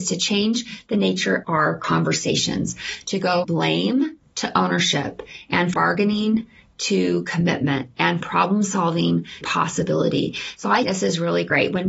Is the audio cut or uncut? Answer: cut